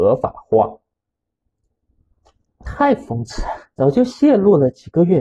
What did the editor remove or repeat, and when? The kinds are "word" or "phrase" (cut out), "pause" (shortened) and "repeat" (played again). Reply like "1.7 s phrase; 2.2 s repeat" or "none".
3.7 s pause